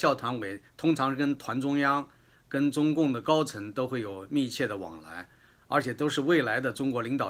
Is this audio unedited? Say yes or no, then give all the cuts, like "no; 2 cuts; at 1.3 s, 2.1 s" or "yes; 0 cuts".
yes; 0 cuts